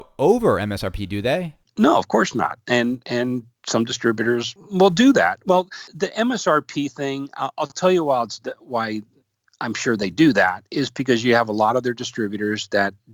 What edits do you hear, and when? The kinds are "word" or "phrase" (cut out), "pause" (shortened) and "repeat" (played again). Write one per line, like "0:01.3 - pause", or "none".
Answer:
none